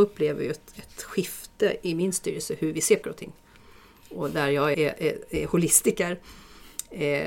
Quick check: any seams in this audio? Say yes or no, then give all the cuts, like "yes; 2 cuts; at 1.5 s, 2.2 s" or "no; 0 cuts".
yes; 2 cuts; at 3.0 s, 4.7 s